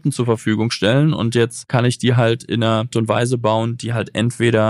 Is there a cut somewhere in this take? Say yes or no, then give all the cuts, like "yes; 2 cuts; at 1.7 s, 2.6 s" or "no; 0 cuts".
yes; 1 cut; at 2.9 s